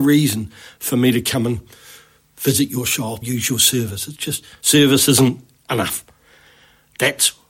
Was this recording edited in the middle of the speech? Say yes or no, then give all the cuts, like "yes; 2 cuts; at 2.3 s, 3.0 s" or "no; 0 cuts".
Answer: yes; 1 cut; at 3.2 s